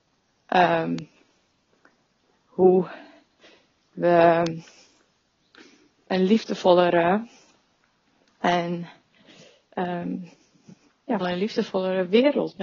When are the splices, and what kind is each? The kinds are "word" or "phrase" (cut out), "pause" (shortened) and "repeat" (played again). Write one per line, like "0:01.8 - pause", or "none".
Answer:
0:11.2 - word